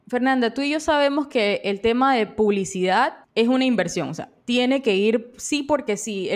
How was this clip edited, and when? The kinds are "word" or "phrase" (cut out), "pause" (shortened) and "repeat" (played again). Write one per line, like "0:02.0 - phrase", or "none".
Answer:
0:03.2 - pause